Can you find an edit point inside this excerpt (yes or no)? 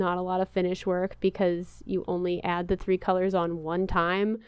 no